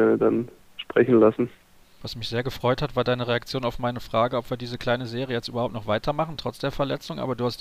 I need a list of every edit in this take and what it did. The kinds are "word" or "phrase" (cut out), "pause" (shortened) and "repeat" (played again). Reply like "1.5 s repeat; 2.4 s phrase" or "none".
none